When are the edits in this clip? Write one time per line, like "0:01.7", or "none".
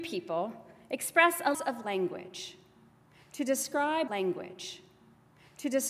0:01.5
0:04.1